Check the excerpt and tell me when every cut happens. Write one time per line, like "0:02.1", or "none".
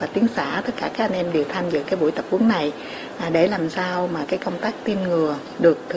none